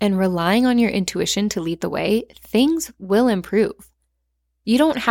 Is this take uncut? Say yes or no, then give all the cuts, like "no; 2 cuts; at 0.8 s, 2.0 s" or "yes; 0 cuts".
yes; 0 cuts